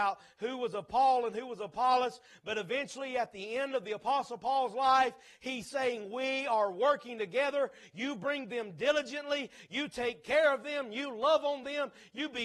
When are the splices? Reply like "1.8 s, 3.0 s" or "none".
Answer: none